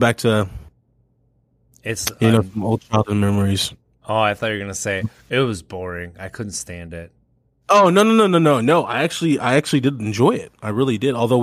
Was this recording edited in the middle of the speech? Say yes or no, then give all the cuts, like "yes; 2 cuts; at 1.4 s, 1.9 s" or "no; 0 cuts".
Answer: no; 0 cuts